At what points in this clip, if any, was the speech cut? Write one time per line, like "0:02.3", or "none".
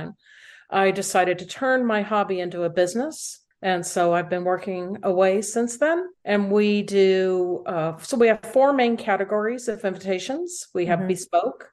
0:03.5
0:06.1

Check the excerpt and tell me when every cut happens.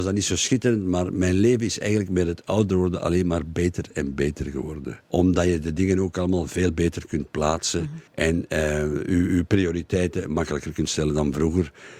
0:05.0
0:08.1

